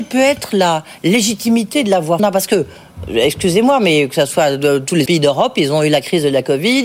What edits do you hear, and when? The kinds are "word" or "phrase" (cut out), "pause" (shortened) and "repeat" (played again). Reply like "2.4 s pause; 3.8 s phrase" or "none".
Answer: 2.2 s phrase; 5.1 s word